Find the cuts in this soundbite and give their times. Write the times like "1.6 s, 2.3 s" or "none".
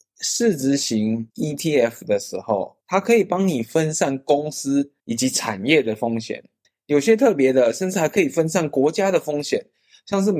1.3 s, 2.8 s, 5.0 s, 6.6 s

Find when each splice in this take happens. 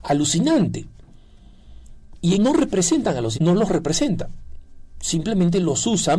2.4 s, 3.4 s

